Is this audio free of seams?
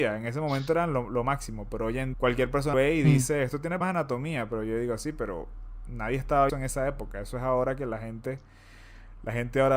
no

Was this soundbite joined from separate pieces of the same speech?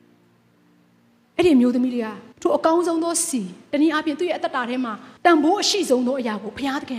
yes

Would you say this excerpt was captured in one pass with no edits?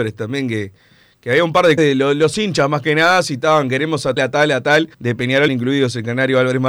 no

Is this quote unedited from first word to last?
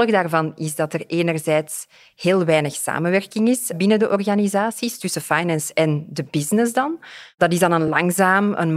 yes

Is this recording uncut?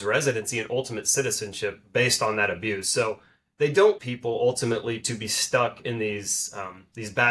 no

